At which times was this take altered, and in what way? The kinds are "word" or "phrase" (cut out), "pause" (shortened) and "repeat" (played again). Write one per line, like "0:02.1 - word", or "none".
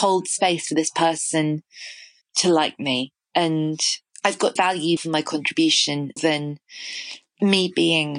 0:02.2 - word
0:04.1 - word
0:04.6 - word
0:05.0 - word
0:06.2 - word